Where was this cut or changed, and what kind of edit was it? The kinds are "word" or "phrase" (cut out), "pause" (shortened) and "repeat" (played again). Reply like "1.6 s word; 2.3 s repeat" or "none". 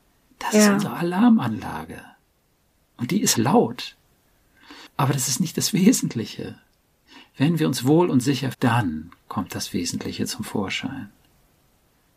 3.3 s word; 8.5 s word